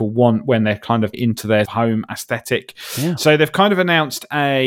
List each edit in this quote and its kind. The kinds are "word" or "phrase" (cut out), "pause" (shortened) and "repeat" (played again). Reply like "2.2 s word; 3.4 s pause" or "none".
1.1 s word; 1.7 s word